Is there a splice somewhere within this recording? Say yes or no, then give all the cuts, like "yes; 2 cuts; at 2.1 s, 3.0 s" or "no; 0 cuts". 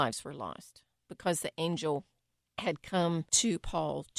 yes; 2 cuts; at 2.4 s, 3.3 s